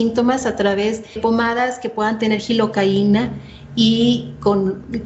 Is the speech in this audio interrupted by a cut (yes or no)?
yes